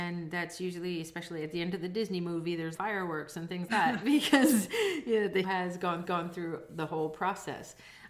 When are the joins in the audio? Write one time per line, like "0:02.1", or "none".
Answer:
0:02.7
0:03.7
0:05.4
0:06.0